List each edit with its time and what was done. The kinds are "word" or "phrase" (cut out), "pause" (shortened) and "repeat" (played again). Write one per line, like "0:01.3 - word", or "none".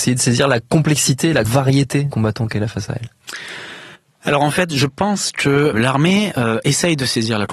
0:01.4 - word
0:02.1 - word
0:04.0 - pause
0:05.7 - word